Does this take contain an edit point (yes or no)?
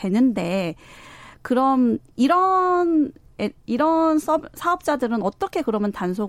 no